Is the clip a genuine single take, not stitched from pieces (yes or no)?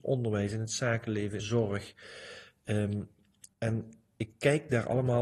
no